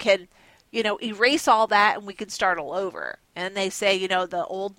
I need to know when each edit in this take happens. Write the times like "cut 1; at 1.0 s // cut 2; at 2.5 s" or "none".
cut 1; at 3.2 s